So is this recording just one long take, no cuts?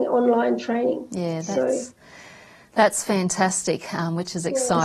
yes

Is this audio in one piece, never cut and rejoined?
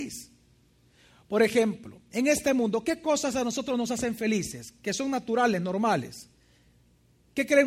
yes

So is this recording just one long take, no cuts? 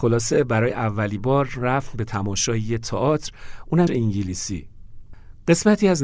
no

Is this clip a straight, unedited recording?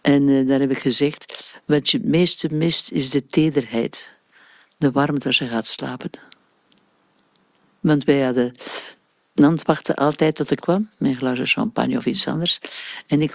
no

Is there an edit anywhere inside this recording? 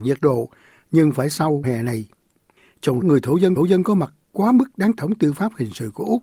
yes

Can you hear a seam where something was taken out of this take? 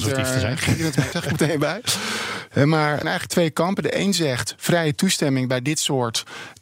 yes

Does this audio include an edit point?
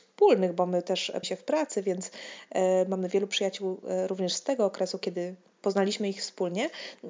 yes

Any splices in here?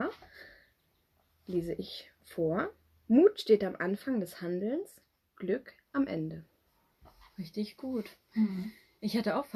no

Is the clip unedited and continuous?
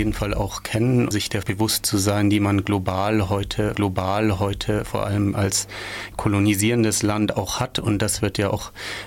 no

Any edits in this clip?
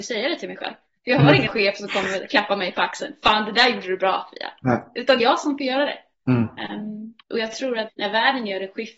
yes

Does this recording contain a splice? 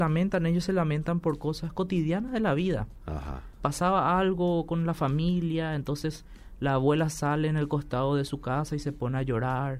no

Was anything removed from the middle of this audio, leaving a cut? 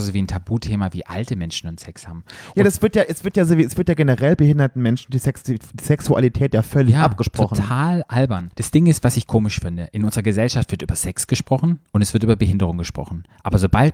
yes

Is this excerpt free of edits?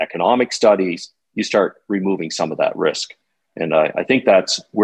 yes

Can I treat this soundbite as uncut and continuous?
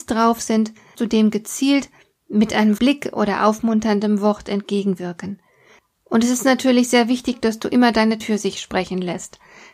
no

